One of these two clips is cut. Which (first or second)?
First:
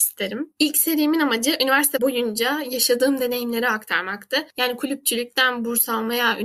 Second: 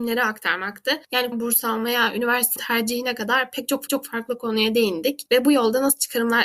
second